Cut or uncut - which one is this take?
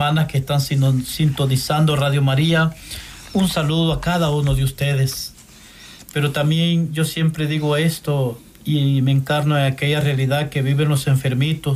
uncut